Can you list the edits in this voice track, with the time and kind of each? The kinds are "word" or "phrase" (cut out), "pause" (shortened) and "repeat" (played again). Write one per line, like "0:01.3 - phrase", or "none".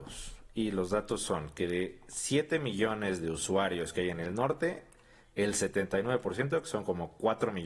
none